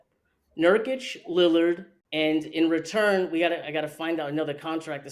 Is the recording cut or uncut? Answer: cut